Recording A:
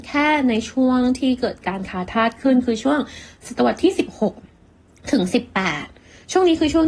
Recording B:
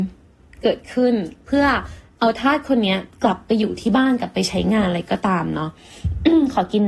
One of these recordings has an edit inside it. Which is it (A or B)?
B